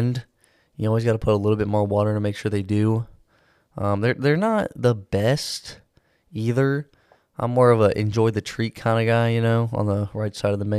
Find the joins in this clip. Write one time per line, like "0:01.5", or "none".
none